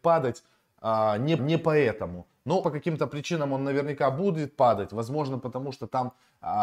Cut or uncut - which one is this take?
cut